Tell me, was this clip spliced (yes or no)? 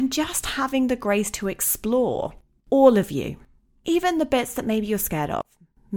no